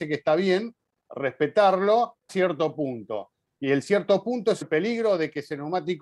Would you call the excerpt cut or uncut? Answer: cut